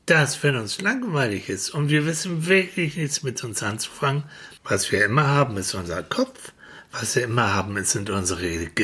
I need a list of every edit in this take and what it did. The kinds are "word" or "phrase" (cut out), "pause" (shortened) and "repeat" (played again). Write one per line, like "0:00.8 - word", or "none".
0:04.6 - pause